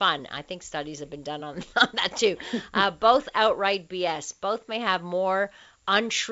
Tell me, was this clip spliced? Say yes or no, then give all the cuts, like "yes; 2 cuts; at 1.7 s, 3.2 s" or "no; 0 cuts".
no; 0 cuts